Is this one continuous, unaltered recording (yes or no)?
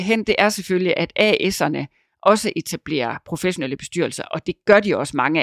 yes